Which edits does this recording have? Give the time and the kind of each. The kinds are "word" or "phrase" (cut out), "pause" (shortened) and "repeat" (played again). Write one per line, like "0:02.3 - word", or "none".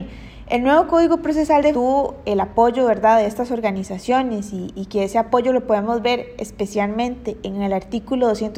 0:01.7 - phrase